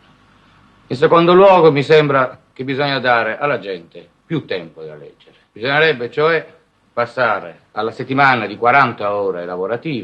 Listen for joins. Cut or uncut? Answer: uncut